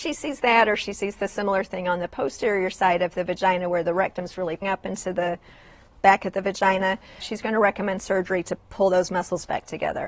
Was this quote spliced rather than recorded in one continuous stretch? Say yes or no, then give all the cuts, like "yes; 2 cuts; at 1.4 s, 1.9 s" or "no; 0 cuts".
yes; 2 cuts; at 4.6 s, 7.2 s